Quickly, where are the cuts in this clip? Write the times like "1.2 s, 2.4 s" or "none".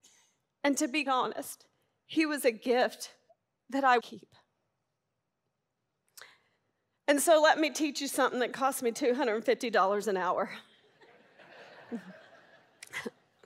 1.1 s, 3.3 s, 4.0 s

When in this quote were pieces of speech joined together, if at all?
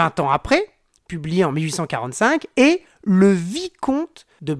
none

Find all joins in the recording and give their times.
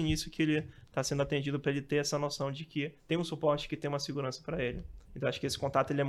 3.0 s, 5.1 s

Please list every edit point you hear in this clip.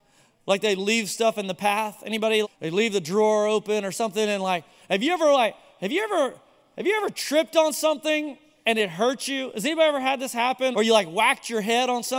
2.4 s, 10.7 s

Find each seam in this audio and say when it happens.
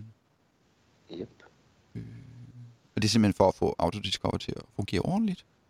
none

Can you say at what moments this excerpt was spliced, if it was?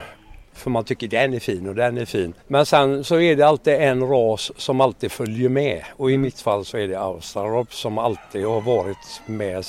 2.4 s

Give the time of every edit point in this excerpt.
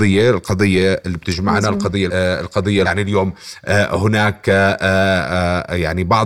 2.1 s, 2.8 s

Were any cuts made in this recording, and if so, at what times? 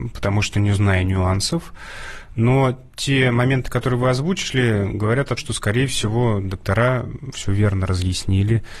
5.4 s, 7.3 s

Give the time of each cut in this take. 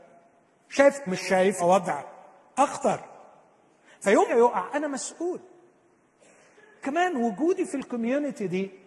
1.1 s, 1.6 s, 4.3 s, 6.8 s

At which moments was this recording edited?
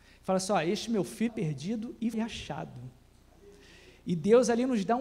1.3 s, 2.1 s

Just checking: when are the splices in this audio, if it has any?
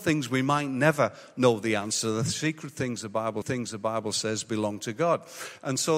3.4 s

